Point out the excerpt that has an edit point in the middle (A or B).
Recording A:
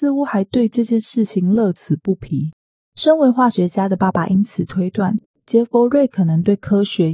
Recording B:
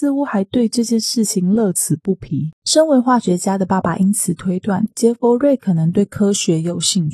B